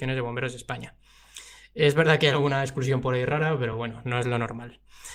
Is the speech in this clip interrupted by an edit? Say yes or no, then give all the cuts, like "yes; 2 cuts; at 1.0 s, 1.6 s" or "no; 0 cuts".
no; 0 cuts